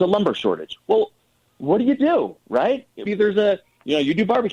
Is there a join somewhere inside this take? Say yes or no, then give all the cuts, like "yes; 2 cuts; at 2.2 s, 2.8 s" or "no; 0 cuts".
yes; 1 cut; at 3.1 s